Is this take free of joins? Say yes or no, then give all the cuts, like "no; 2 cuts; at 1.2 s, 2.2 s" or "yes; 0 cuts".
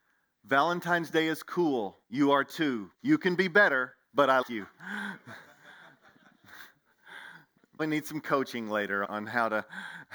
no; 6 cuts; at 2.0 s, 2.9 s, 4.0 s, 4.4 s, 7.8 s, 9.0 s